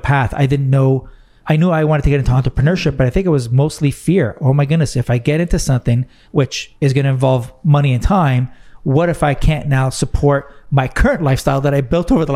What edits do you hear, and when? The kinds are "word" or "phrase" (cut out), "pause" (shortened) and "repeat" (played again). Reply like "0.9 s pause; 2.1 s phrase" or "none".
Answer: none